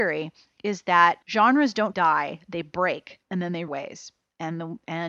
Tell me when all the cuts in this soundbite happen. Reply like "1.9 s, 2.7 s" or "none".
1.2 s, 1.9 s, 3.2 s, 3.7 s

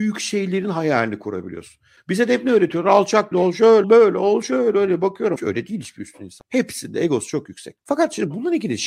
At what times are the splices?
3.3 s, 3.8 s, 5.4 s

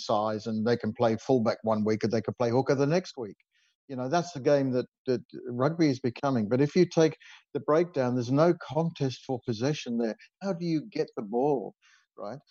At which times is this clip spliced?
none

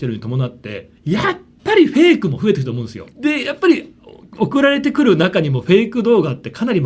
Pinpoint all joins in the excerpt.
0.9 s, 3.1 s

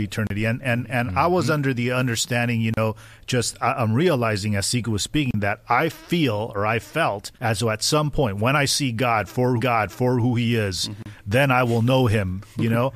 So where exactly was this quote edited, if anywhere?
7.3 s, 9.6 s

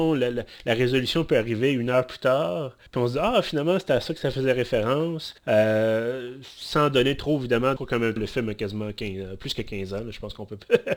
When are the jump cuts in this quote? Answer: 2.9 s, 5.4 s, 7.8 s, 8.2 s

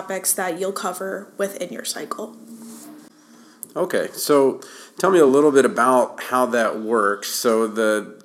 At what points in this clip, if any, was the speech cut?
none

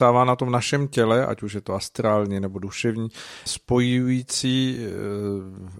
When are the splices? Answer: 3.5 s

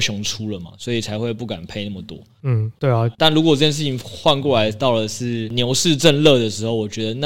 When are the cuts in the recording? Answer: 3.1 s

